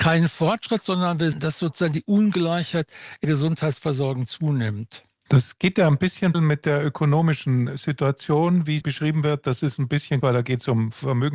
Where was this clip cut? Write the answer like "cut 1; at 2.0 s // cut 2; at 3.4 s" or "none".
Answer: cut 1; at 1.3 s // cut 2; at 3.2 s // cut 3; at 6.3 s // cut 4; at 8.8 s // cut 5; at 10.2 s